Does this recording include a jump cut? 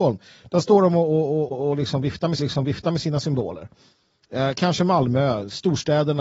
yes; 2 cuts; at 1.5 s, 2.4 s

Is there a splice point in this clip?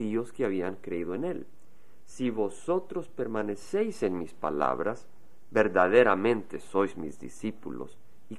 no; 0 cuts

